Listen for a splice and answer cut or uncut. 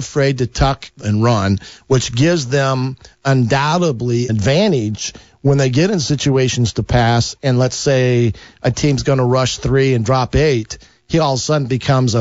cut